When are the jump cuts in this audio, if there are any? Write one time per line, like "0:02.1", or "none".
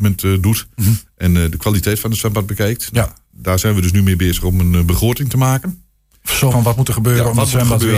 0:06.5